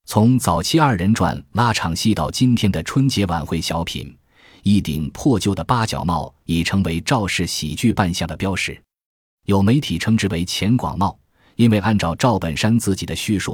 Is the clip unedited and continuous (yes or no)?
yes